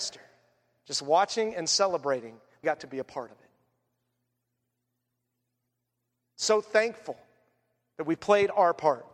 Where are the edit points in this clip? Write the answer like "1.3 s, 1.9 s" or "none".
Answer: 2.6 s